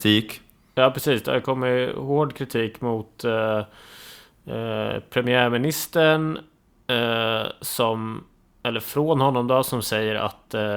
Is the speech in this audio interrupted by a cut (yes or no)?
no